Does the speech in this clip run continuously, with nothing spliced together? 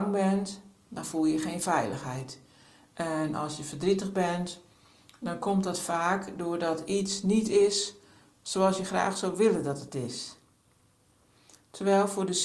yes; 0 cuts

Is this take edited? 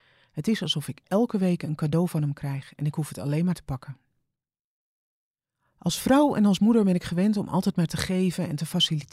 yes; 1 cut; at 3.5 s

